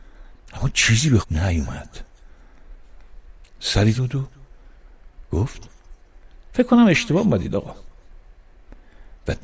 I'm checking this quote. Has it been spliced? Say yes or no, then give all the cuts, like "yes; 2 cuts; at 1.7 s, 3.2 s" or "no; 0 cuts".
yes; 2 cuts; at 1.2 s, 3.9 s